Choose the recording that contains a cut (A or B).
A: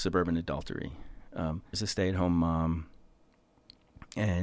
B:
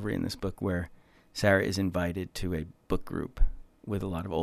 A